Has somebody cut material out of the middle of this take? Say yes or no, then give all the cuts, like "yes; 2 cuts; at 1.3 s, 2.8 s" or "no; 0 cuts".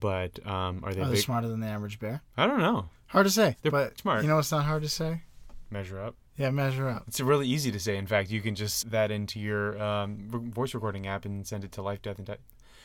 yes; 4 cuts; at 2.3 s, 4.0 s, 6.3 s, 8.8 s